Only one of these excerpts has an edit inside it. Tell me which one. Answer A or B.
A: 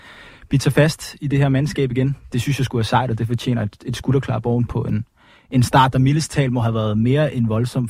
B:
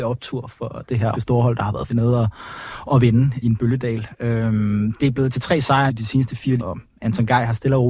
B